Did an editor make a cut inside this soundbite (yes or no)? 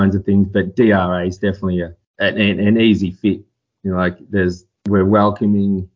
no